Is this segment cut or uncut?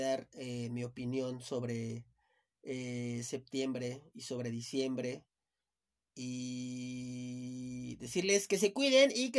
uncut